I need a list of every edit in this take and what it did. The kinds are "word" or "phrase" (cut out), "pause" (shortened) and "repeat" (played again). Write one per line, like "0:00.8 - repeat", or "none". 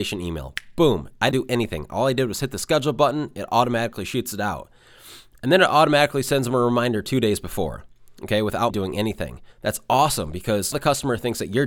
0:01.3 - word
0:08.7 - word
0:09.5 - pause
0:10.7 - word